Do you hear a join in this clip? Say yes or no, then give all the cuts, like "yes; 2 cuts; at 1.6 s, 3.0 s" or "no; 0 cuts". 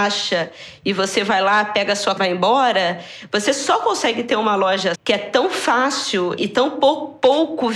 yes; 3 cuts; at 2.2 s, 4.9 s, 6.4 s